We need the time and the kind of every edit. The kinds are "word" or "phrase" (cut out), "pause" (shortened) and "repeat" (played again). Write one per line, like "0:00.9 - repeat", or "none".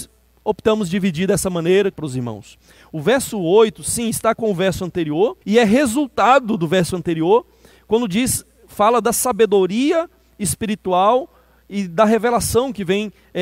0:01.9 - phrase
0:04.3 - word
0:05.4 - pause